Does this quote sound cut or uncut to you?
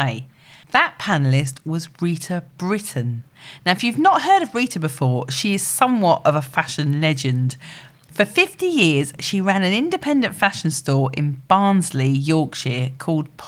uncut